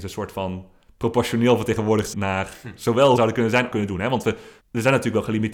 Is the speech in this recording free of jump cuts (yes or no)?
no